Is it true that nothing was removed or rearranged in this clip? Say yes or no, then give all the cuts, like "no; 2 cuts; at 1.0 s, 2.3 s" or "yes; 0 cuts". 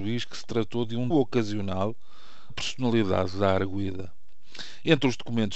no; 2 cuts; at 1.1 s, 2.5 s